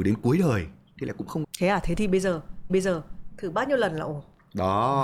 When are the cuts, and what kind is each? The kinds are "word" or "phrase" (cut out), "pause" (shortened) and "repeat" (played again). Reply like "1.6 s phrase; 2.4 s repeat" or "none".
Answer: 1.4 s word; 2.7 s repeat

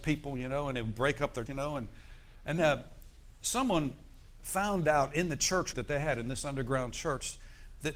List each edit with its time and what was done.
1.5 s phrase; 2.6 s word; 5.7 s word

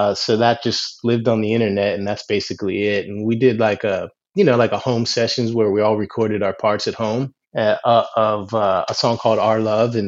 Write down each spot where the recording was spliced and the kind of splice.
7.4 s pause

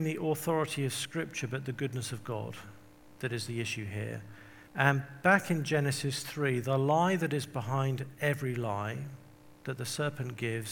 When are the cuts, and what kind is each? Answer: 4.7 s pause

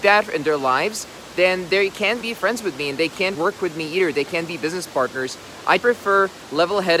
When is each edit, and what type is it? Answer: 2.2 s word; 3.3 s word; 5.8 s word

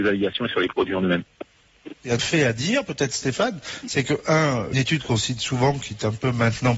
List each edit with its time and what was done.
2.2 s word; 4.7 s phrase

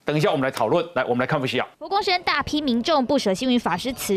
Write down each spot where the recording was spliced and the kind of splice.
1.7 s pause

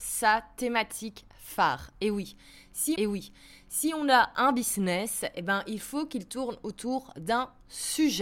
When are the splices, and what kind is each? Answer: 3.0 s repeat

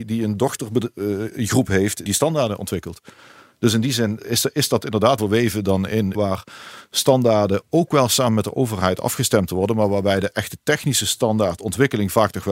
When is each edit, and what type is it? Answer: 2.1 s word; 4.2 s word; 5.2 s word; 6.1 s word

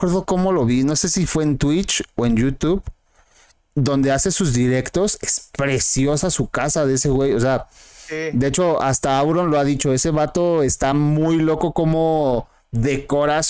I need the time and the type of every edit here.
none

